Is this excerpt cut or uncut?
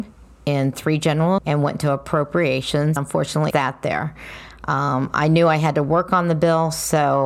cut